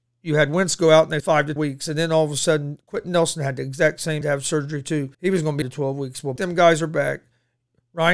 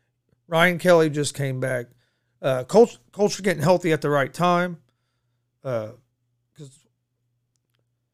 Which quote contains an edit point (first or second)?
first